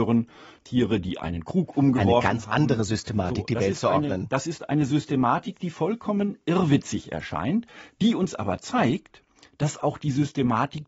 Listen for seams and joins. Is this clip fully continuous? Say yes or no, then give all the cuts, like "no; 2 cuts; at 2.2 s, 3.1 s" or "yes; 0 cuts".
yes; 0 cuts